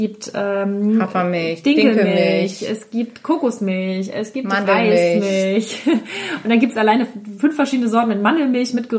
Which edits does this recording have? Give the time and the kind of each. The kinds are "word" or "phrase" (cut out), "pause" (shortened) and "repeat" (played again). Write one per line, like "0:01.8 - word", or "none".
none